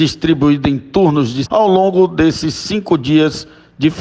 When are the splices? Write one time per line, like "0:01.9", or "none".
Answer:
0:01.4